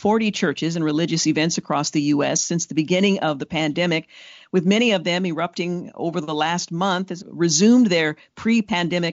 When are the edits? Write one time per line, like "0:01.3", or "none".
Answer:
0:07.2